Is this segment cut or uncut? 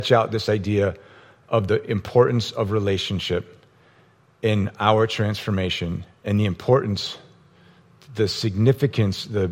uncut